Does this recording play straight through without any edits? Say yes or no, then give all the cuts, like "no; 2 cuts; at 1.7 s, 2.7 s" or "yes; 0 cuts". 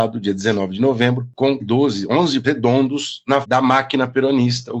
no; 3 cuts; at 1.6 s, 2.4 s, 3.4 s